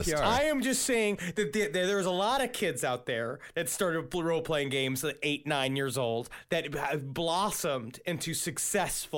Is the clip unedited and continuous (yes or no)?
yes